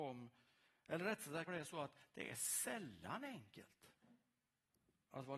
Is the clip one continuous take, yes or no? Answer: no